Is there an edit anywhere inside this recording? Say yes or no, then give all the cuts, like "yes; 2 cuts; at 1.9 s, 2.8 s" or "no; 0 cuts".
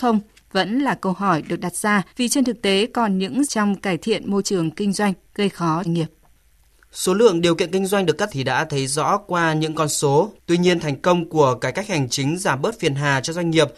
yes; 5 cuts; at 2.1 s, 3.5 s, 5.8 s, 8.3 s, 10.4 s